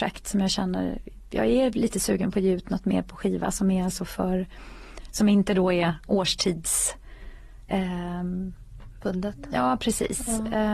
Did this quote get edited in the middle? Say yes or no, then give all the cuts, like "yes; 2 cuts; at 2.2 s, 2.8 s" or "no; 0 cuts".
no; 0 cuts